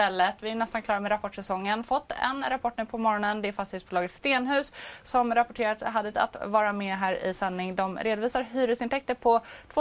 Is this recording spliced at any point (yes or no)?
yes